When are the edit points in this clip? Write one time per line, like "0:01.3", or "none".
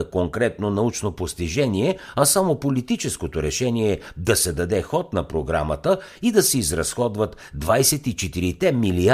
none